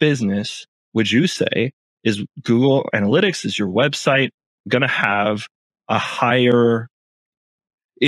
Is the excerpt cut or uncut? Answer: uncut